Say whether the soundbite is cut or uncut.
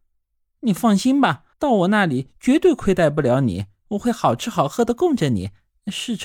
cut